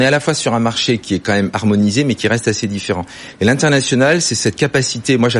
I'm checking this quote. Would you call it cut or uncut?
uncut